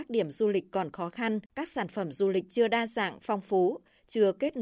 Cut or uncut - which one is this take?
cut